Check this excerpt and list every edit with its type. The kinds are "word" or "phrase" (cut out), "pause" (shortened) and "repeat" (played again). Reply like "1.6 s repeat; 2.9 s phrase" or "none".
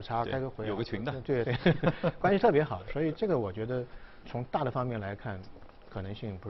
4.2 s word